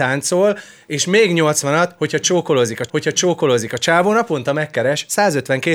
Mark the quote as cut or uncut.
cut